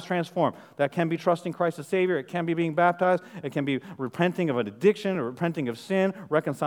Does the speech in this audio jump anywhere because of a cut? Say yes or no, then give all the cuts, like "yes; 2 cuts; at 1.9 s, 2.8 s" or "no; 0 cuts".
no; 0 cuts